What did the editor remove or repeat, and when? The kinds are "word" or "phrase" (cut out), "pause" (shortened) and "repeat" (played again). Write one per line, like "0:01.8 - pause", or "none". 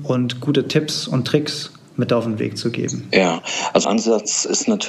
0:03.8 - word

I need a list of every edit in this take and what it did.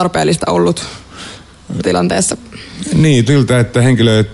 0:01.8 - word
0:03.3 - word

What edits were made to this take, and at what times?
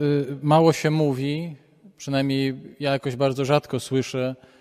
none

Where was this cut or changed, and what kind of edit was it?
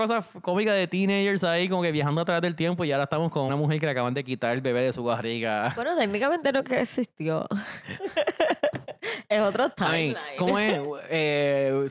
0:03.5 - word

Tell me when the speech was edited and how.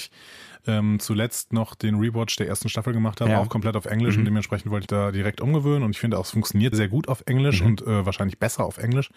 0:04.9 - phrase
0:06.7 - word

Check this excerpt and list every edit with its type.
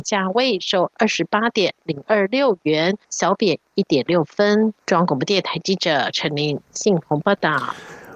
0:03.0 - pause
0:04.8 - pause

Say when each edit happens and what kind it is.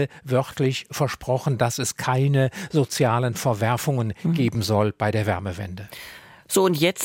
none

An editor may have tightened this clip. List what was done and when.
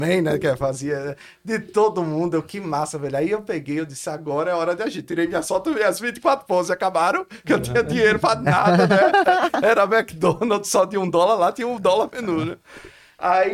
none

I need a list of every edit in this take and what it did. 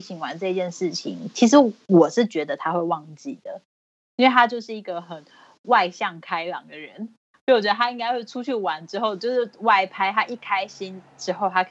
none

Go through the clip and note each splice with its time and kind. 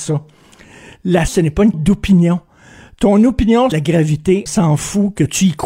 0:01.3 - word
0:01.7 - word
0:03.7 - phrase
0:04.5 - word

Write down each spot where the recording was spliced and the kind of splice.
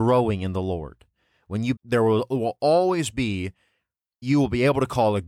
0:01.8 - word
0:04.2 - word

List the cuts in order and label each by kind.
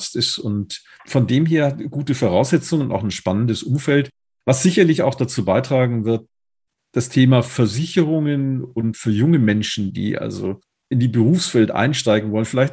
0:01.0 - word
0:08.9 - word
0:10.9 - word

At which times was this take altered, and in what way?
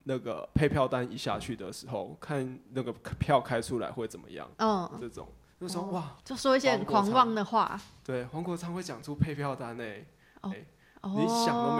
0:04.5 - pause
0:06.2 - pause
0:10.5 - repeat

